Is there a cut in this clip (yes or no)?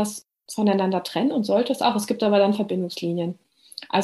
no